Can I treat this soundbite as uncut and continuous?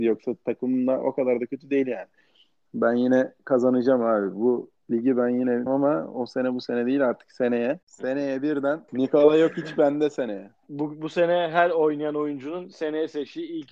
no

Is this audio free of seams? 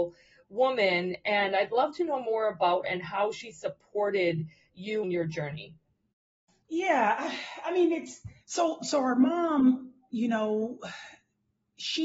no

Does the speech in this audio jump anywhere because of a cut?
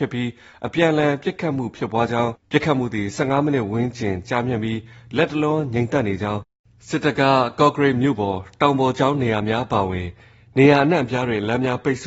no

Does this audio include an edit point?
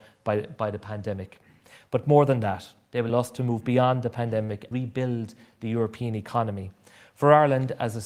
yes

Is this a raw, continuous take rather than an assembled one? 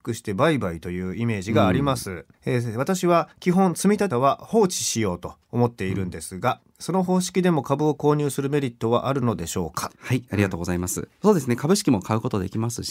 no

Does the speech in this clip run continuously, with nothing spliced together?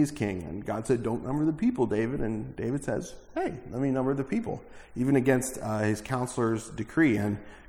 yes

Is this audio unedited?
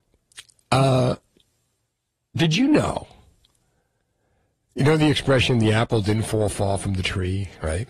yes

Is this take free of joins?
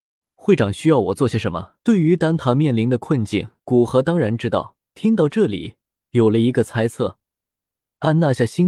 no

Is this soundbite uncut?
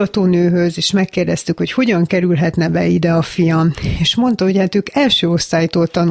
yes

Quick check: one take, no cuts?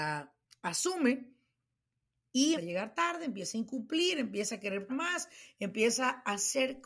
no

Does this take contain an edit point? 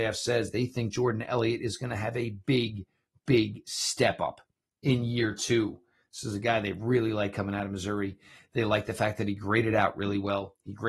no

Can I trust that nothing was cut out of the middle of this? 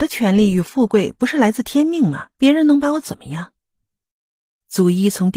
no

